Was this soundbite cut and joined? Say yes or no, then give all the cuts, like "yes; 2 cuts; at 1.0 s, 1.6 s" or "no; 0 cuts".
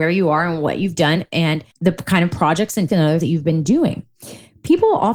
yes; 3 cuts; at 1.7 s, 2.9 s, 3.2 s